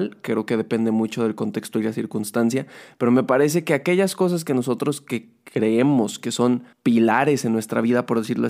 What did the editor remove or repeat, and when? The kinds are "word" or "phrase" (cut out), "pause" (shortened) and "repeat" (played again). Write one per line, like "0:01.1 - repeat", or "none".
0:06.7 - pause